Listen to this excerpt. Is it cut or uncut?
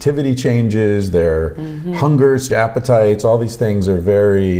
cut